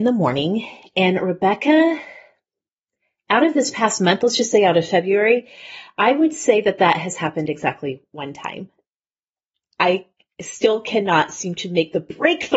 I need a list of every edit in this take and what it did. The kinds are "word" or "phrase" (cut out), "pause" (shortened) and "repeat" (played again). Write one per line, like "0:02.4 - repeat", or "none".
none